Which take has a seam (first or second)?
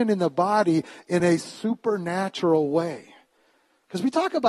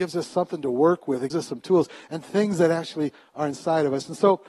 second